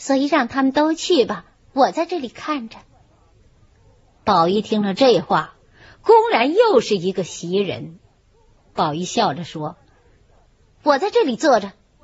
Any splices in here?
no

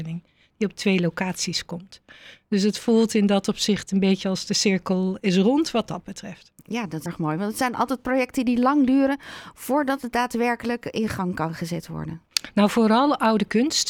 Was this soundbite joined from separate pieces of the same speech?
yes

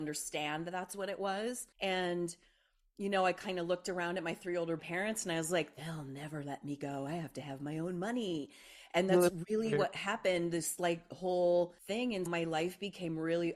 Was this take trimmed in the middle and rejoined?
yes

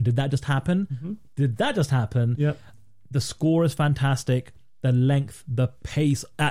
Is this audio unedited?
yes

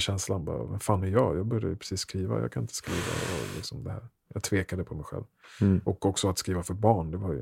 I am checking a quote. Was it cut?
no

